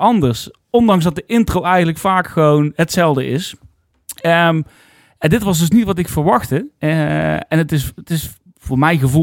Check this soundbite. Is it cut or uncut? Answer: uncut